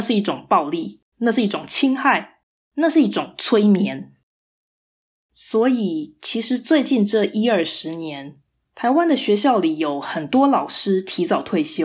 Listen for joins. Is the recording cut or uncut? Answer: uncut